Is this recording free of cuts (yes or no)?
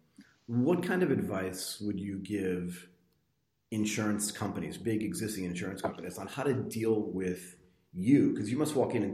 yes